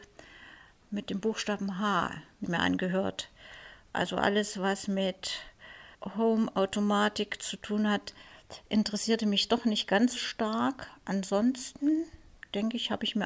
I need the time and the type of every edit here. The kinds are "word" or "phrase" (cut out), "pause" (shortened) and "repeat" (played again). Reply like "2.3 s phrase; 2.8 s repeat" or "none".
2.4 s word; 5.9 s pause; 10.2 s word